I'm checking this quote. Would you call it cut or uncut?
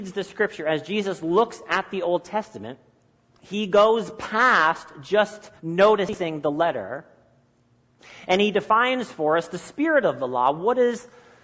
cut